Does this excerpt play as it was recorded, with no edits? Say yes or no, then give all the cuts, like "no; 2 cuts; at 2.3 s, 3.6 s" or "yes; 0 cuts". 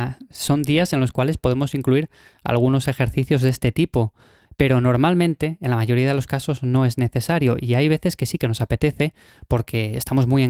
yes; 0 cuts